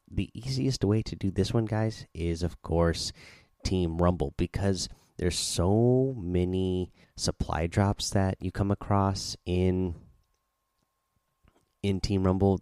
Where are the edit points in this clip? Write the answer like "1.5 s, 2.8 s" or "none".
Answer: 7.0 s